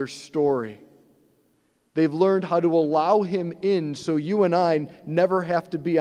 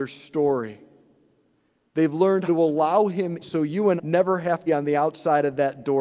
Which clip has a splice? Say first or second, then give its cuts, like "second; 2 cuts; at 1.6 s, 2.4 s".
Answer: second; 4 cuts; at 2.5 s, 3.4 s, 4.0 s, 4.7 s